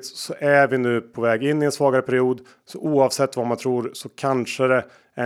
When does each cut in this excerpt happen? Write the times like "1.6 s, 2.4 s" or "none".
none

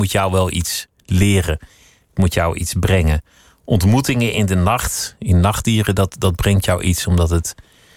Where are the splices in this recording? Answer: none

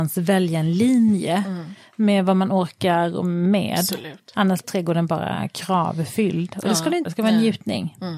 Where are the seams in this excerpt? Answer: 4.6 s, 7.0 s

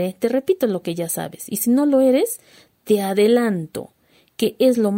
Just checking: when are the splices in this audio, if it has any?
none

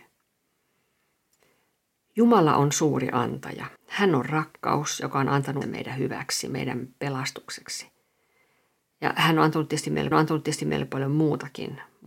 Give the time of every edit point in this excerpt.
3.8 s, 5.6 s, 10.1 s

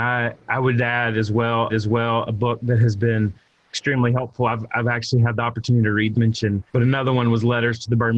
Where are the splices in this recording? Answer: 1.7 s, 4.7 s, 6.1 s, 6.7 s

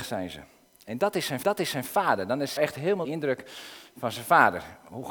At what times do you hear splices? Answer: 1.4 s, 2.6 s, 3.0 s

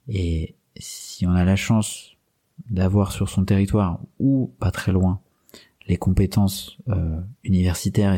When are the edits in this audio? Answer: none

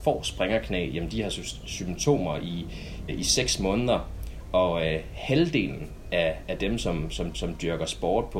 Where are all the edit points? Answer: 3.1 s, 7.3 s

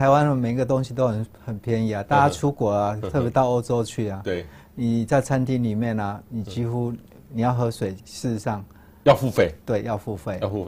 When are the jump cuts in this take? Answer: 8.0 s

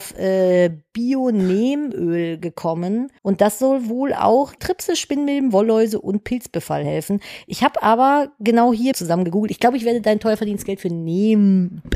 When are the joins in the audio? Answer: 3.2 s, 4.6 s, 8.9 s

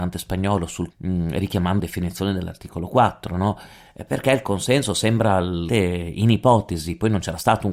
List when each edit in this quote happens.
0.9 s, 1.8 s, 5.7 s

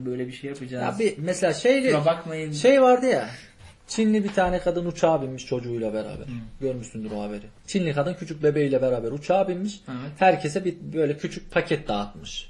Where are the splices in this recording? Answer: 7.6 s

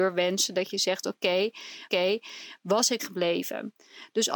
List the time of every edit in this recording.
1.9 s, 3.0 s

